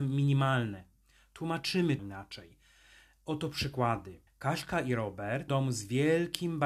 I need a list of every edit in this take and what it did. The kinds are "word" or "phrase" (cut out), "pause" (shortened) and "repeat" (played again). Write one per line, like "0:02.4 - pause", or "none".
0:02.0 - word
0:04.3 - pause
0:05.5 - word